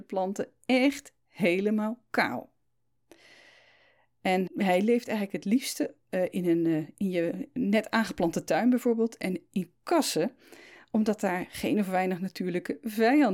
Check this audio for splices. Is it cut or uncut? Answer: cut